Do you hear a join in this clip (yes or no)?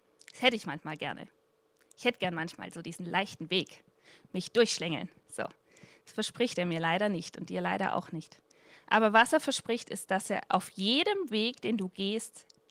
no